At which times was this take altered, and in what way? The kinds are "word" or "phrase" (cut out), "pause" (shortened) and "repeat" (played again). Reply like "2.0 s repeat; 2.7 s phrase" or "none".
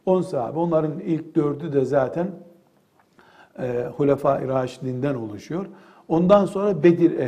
none